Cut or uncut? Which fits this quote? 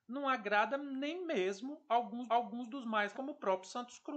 cut